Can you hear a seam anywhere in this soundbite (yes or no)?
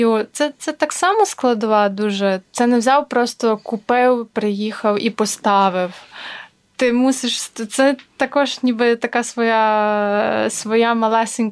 no